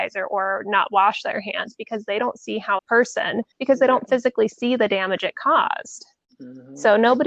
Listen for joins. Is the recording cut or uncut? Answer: cut